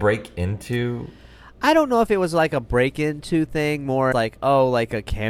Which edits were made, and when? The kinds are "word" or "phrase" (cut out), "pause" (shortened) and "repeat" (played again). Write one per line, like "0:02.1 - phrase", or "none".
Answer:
0:04.1 - word

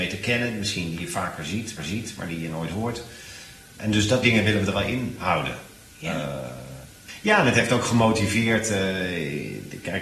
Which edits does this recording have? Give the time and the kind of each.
0:01.8 - repeat
0:04.2 - word
0:04.7 - word

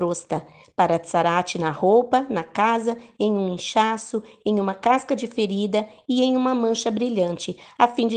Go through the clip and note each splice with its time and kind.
none

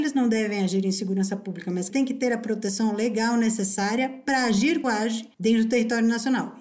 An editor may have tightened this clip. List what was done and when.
0:01.9 - word
0:04.8 - phrase
0:05.3 - pause

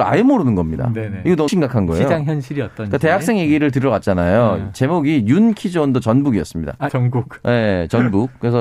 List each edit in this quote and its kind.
0:01.5 - word
0:06.9 - word

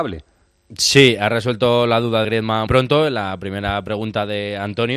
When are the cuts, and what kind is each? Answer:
0:02.2 - word
0:02.7 - word

